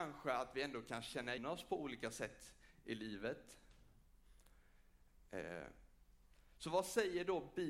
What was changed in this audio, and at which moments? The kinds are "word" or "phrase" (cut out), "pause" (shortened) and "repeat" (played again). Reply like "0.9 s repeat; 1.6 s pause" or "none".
1.4 s word